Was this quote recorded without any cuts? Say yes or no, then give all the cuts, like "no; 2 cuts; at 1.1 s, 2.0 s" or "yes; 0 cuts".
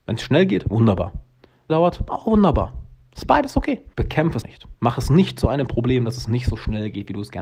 no; 4 cuts; at 1.7 s, 3.9 s, 4.4 s, 4.8 s